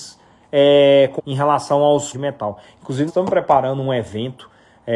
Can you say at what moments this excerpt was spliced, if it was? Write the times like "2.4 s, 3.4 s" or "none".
1.2 s, 2.1 s, 3.1 s